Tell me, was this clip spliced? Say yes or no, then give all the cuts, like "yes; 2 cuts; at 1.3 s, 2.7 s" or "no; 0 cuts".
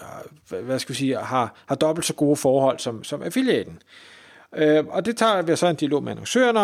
no; 0 cuts